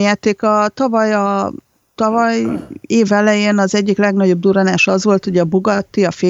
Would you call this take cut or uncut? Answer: uncut